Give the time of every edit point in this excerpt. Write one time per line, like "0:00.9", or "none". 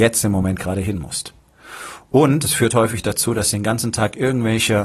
none